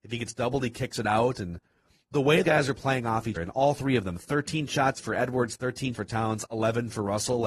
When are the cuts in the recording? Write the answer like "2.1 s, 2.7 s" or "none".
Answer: 2.4 s, 3.4 s, 5.9 s